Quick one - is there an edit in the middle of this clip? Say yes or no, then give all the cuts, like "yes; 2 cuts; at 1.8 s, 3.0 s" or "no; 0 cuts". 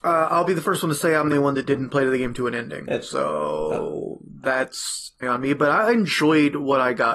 yes; 2 cuts; at 1.3 s, 5.2 s